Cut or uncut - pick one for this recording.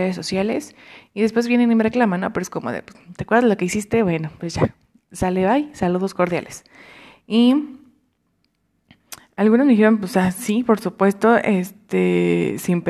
uncut